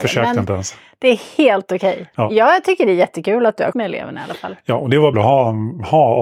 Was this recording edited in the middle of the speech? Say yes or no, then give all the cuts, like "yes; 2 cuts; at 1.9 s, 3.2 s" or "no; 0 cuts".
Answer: yes; 2 cuts; at 3.7 s, 5.1 s